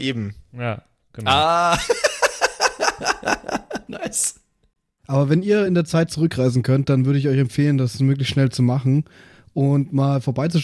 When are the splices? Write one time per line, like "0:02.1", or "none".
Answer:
none